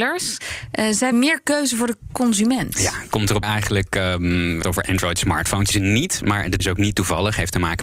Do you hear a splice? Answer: yes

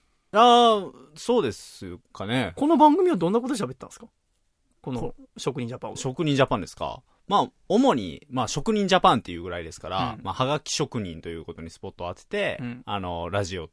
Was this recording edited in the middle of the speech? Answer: no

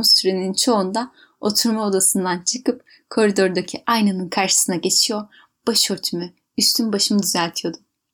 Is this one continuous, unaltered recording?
yes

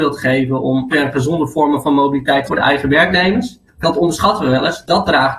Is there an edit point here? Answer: yes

